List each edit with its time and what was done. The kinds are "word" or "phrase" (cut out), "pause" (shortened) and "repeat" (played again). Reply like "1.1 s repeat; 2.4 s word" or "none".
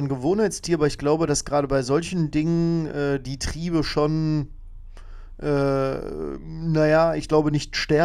none